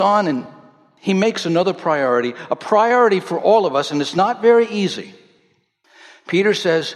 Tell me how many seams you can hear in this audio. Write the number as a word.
zero